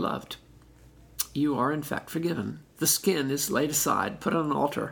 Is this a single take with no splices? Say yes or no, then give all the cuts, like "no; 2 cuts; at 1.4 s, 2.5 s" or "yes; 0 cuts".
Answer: yes; 0 cuts